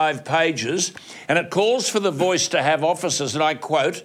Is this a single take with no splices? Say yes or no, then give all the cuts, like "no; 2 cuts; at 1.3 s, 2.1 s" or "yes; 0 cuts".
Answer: yes; 0 cuts